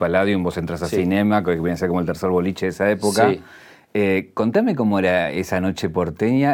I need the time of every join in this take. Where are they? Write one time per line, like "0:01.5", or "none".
none